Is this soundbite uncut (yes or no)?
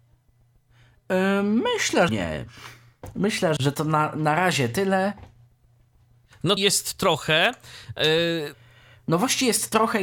no